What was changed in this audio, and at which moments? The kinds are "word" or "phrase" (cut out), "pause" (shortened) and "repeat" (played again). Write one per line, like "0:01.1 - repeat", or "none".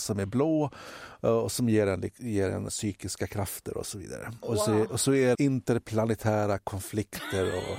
0:02.7 - word
0:05.3 - word